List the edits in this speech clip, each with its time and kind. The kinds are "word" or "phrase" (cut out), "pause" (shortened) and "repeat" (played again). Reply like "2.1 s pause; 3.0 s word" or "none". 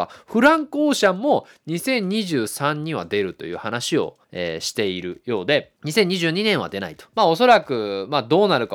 4.2 s pause; 5.8 s pause; 7.1 s pause